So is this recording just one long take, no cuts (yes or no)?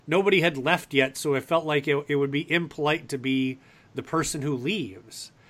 yes